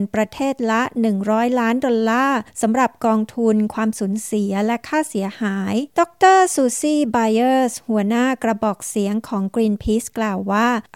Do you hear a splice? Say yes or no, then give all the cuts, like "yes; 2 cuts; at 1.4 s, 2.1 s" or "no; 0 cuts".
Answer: yes; 1 cut; at 5.9 s